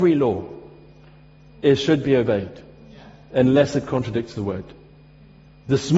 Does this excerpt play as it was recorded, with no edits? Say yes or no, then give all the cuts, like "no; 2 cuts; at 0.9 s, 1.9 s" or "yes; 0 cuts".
yes; 0 cuts